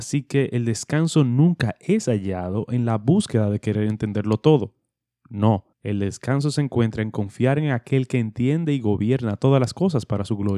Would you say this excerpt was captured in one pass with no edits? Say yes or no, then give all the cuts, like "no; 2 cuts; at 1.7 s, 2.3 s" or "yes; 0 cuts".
no; 1 cut; at 5.7 s